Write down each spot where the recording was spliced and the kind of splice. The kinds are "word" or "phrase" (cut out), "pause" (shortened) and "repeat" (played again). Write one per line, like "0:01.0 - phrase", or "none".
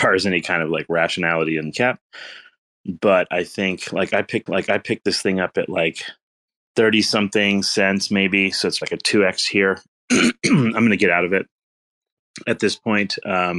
0:01.7 - phrase
0:04.5 - repeat
0:06.3 - pause
0:08.8 - word